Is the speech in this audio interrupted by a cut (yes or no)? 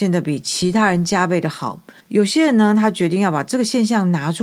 yes